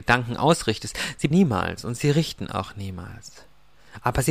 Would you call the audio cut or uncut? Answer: cut